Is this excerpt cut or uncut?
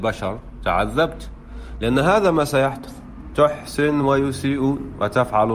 uncut